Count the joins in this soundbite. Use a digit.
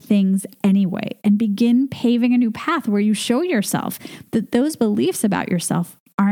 0